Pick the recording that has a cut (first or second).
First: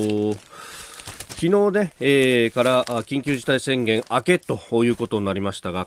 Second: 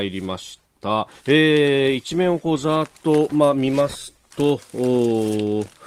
second